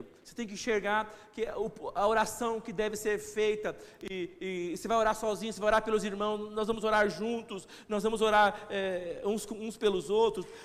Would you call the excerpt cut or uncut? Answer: uncut